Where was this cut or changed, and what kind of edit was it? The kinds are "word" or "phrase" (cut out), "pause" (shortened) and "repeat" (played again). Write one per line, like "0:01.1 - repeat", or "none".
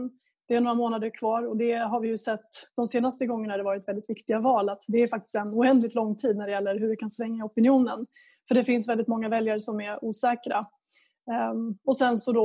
none